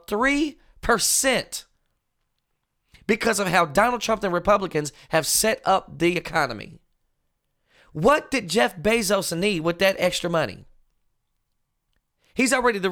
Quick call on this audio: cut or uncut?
uncut